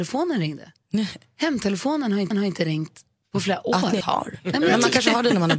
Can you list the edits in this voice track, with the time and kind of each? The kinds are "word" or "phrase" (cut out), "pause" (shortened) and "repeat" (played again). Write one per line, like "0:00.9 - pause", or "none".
0:02.3 - repeat
0:04.0 - word